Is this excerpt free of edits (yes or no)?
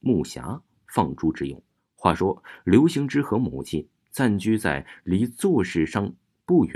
no